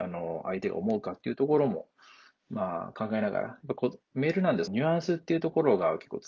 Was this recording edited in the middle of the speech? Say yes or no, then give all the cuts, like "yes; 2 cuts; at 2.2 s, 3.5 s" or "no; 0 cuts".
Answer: yes; 2 cuts; at 4.0 s, 4.7 s